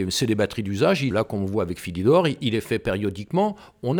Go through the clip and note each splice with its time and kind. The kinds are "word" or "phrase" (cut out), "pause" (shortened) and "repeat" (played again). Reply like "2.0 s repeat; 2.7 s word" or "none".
1.1 s phrase